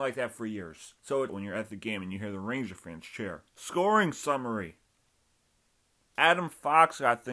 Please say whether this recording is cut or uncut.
cut